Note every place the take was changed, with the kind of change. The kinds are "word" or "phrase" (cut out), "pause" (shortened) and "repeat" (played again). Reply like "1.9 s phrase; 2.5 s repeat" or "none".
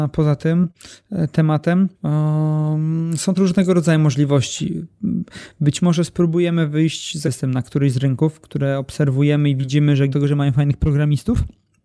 1.9 s pause; 3.3 s word; 7.2 s word; 10.1 s phrase